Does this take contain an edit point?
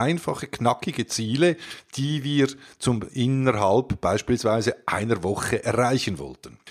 no; 0 cuts

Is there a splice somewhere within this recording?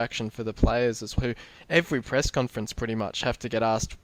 yes; 1 cut; at 1.2 s

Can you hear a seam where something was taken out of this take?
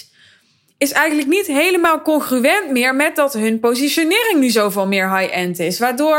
no; 0 cuts

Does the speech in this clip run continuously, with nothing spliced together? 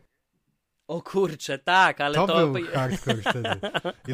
yes; 0 cuts

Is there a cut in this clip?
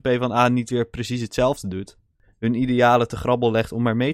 no; 0 cuts

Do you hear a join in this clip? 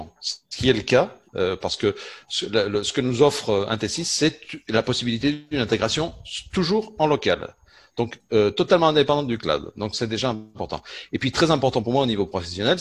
no; 0 cuts

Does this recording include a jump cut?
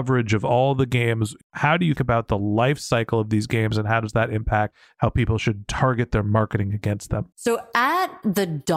yes; 2 cuts; at 2.0 s, 7.3 s

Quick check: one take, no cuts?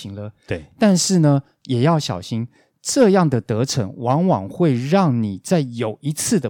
yes; 0 cuts

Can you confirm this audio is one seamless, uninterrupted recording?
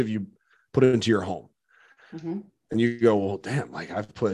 yes; 0 cuts

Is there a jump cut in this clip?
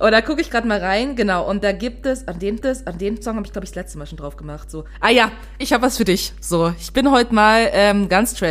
yes; 2 cuts; at 2.6 s, 5.6 s

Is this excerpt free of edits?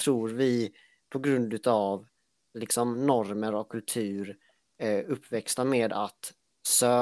yes; 0 cuts

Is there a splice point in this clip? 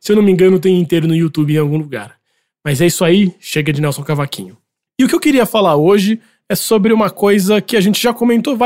no; 0 cuts

